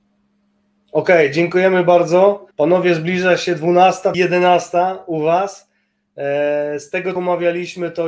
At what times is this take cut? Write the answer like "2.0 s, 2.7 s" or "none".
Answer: 2.5 s, 4.1 s, 7.2 s